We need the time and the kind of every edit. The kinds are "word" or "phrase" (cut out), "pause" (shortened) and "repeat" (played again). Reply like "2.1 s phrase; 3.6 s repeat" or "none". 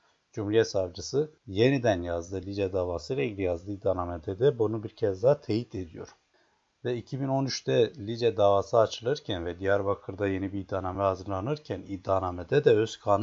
none